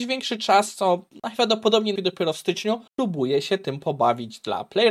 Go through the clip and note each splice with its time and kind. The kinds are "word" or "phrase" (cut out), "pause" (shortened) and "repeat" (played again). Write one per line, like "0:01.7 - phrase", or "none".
0:02.0 - word
0:02.9 - pause